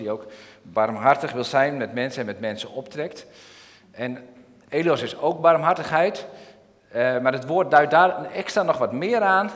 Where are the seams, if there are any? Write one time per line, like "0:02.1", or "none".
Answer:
none